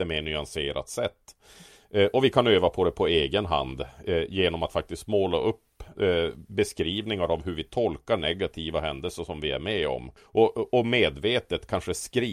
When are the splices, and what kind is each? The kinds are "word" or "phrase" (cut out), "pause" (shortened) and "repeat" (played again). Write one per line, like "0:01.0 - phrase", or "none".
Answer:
0:10.2 - pause